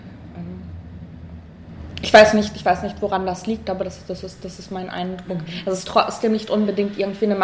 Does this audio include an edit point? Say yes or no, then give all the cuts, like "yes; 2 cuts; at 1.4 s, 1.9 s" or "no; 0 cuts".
no; 0 cuts